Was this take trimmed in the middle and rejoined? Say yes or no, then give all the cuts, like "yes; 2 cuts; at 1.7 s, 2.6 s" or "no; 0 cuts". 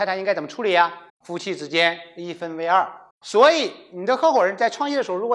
yes; 2 cuts; at 1.1 s, 3.1 s